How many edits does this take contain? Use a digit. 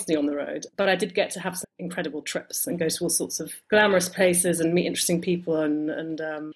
1